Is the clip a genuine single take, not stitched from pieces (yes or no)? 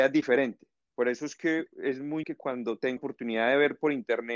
no